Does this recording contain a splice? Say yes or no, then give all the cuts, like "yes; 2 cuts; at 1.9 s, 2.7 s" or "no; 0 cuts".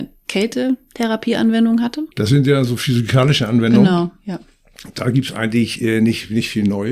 yes; 1 cut; at 2.1 s